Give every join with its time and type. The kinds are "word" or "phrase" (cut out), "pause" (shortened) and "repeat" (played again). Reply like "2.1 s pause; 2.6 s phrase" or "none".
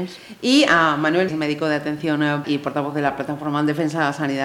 1.3 s phrase; 2.4 s word